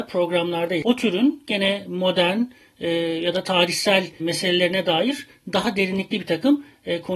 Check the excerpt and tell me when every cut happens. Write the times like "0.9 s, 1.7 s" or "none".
4.2 s